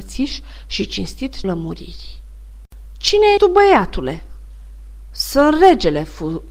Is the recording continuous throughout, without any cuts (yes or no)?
no